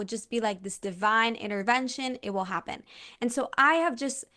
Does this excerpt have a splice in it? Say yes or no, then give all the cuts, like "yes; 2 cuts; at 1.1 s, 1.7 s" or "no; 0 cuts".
no; 0 cuts